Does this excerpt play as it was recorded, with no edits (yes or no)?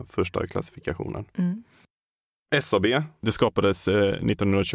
yes